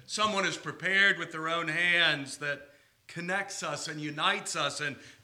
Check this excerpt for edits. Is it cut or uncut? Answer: uncut